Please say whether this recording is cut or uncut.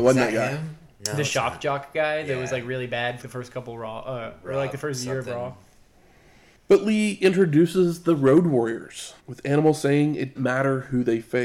cut